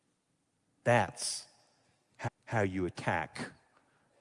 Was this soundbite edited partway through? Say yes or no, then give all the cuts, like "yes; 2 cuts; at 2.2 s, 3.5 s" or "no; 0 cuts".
yes; 1 cut; at 2.3 s